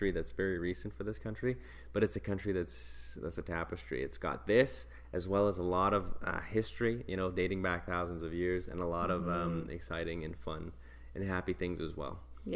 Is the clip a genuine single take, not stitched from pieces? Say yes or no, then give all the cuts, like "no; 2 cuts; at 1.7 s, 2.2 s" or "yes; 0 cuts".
yes; 0 cuts